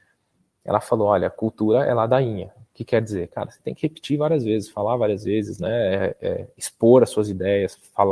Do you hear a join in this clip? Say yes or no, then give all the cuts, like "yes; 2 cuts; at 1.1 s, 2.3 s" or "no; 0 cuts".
no; 0 cuts